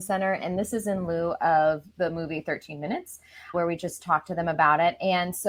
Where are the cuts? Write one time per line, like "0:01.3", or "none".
0:03.5